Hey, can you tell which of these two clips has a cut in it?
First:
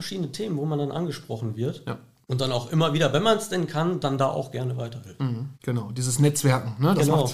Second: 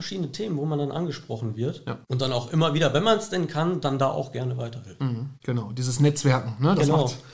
second; 1 cut; at 2.0 s

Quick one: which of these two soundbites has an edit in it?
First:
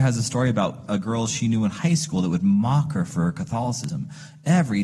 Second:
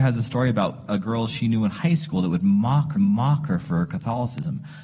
second; 1 cut; at 2.9 s

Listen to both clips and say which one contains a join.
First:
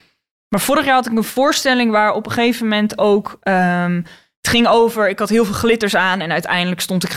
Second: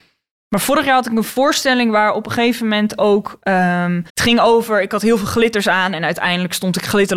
second; 1 cut; at 4.1 s

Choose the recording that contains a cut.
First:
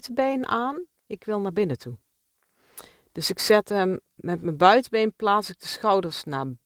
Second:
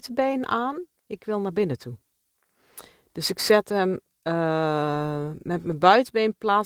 first; 1 cut; at 4.2 s

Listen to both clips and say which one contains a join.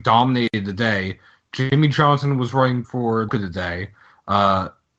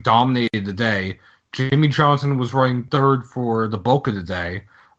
first; 2 cuts; at 2.8 s, 3.3 s

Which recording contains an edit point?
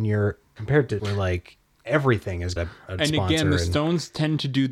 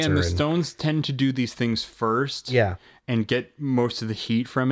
first; 3 cuts; at 1.0 s, 2.6 s, 3.0 s

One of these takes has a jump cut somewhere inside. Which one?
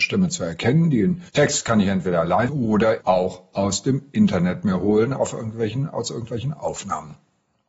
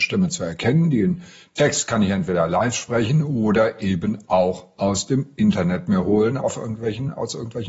first; 3 cuts; at 1.3 s, 2.5 s, 3.0 s

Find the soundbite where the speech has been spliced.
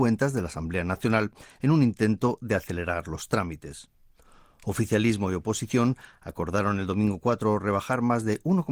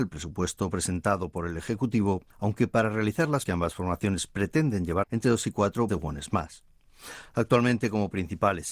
second; 4 cuts; at 2.3 s, 3.5 s, 5.0 s, 5.9 s

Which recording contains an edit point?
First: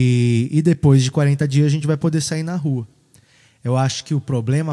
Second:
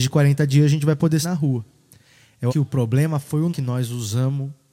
second; 3 cuts; at 1.2 s, 2.5 s, 3.5 s

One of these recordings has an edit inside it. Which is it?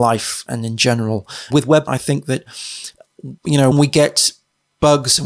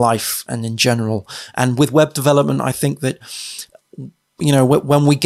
first; 4 cuts; at 1.5 s, 1.9 s, 3.4 s, 3.7 s

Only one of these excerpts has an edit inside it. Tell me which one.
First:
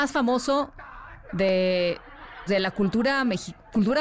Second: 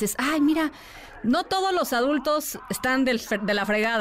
first; 1 cut; at 2.5 s

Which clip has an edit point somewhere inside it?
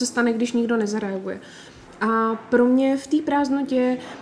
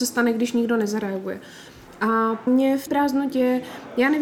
second; 2 cuts; at 2.5 s, 2.9 s

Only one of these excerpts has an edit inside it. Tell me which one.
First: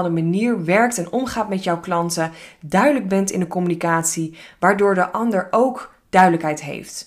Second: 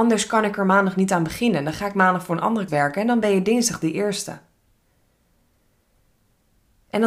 second; 1 cut; at 2.7 s

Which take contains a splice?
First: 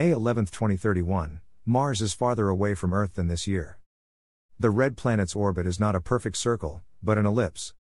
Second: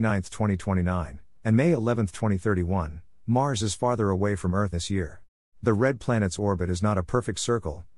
second; 2 cuts; at 4.7 s, 5.4 s

